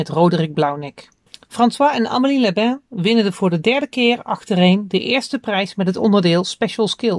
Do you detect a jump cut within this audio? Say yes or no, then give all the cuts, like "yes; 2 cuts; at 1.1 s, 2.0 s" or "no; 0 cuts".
yes; 1 cut; at 1.3 s